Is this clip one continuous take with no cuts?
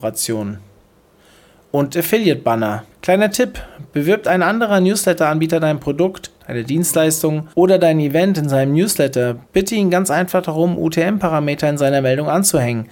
no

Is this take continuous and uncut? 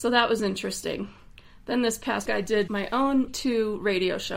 no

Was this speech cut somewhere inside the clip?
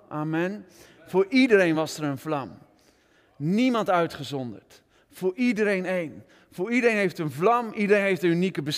no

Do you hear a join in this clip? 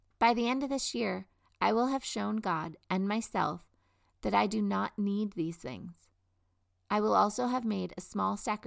no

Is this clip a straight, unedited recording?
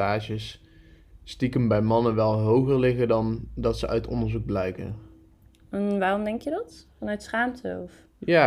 yes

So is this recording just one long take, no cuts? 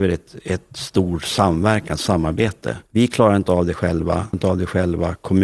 no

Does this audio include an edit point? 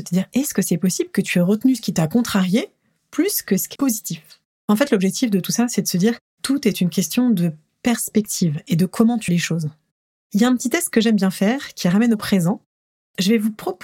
yes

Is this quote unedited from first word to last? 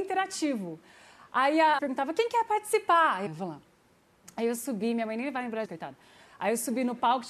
no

